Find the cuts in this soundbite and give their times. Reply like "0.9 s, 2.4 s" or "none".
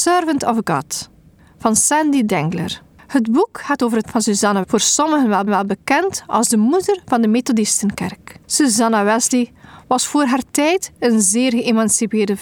1.4 s, 2.9 s, 4.0 s, 4.6 s, 5.5 s, 8.4 s